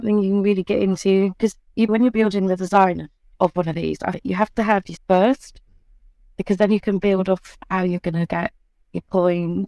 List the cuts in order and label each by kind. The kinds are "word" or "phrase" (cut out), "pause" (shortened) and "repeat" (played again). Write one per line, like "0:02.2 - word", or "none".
0:01.9 - word
0:04.1 - word
0:05.0 - word

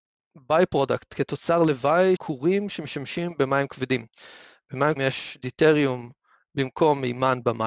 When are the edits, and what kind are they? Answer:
0:02.2 - word
0:05.0 - word

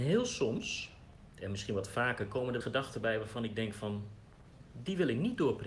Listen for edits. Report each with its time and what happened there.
0:02.6 - phrase

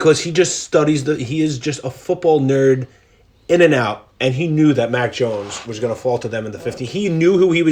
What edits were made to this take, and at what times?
none

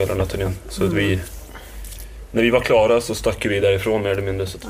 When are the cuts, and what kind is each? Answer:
none

